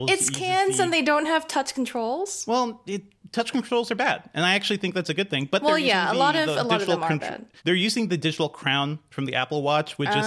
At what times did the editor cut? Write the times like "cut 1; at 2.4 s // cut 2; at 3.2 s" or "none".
cut 1; at 7.6 s